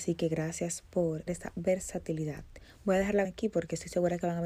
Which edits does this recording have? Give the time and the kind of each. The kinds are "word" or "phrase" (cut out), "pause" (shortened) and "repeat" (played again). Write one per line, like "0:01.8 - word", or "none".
0:01.3 - word
0:03.2 - word